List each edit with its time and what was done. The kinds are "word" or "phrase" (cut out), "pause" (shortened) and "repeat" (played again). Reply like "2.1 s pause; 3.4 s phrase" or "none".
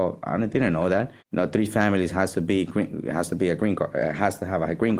1.2 s pause